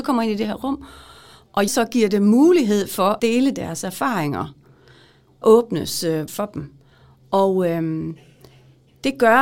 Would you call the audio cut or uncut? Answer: cut